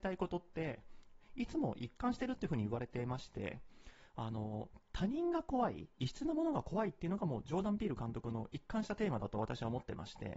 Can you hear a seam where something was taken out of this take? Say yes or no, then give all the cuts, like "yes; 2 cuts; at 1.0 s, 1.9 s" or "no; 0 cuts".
yes; 1 cut; at 5.9 s